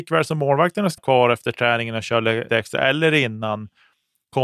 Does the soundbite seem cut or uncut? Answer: cut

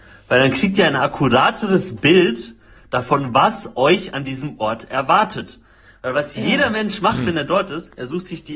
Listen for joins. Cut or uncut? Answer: uncut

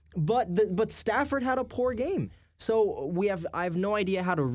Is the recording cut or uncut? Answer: uncut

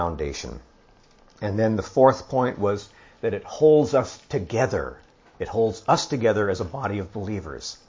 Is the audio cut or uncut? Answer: uncut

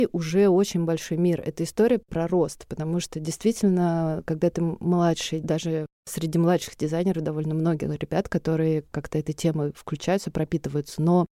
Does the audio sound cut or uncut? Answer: cut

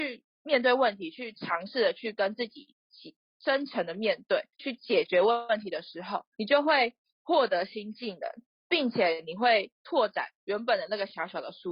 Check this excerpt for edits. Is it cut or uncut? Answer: cut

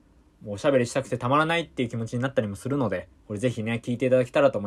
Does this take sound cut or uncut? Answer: cut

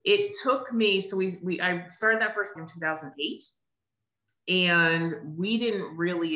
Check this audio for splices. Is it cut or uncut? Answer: cut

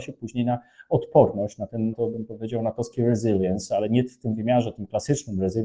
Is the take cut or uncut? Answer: cut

